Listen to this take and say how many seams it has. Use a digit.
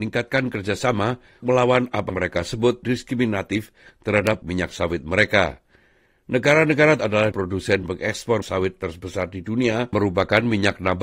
9